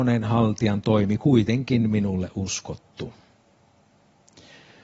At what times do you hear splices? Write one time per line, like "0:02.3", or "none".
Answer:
none